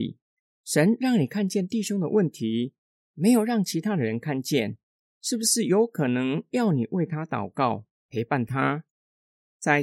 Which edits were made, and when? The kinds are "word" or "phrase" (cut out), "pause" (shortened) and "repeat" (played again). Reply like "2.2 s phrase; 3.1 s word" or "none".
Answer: none